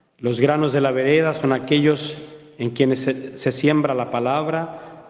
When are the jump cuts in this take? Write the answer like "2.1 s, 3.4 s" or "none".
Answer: none